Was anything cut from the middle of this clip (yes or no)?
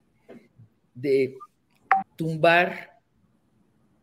yes